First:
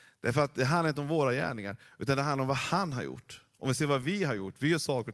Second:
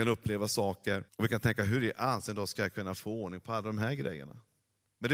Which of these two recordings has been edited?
second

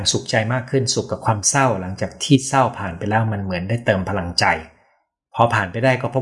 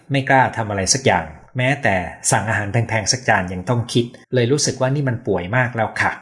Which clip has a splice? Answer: second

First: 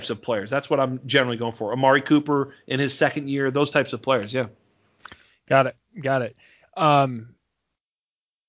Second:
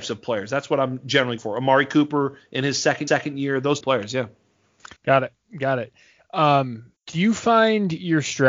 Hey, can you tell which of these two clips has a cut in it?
second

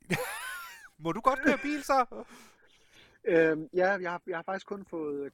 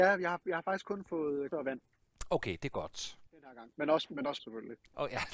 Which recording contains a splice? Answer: second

